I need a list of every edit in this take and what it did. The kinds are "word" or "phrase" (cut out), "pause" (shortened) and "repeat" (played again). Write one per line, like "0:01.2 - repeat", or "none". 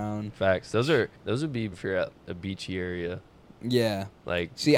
0:01.2 - pause
0:01.7 - word
0:02.1 - word